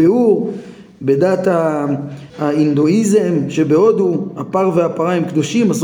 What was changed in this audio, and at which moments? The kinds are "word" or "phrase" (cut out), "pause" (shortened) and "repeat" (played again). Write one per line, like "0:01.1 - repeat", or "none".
0:02.3 - pause